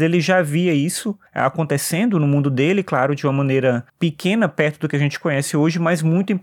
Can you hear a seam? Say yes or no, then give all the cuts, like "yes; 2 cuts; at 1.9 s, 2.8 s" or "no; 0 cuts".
yes; 2 cuts; at 1.3 s, 3.9 s